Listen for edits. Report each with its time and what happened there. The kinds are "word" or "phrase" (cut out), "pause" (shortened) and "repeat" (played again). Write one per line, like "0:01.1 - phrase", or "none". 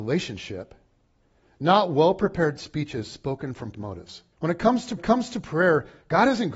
0:03.7 - word
0:04.3 - pause
0:05.0 - repeat